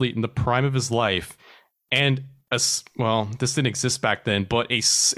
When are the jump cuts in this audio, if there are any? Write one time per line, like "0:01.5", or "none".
none